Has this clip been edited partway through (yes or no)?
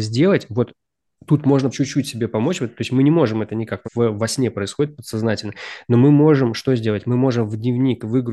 yes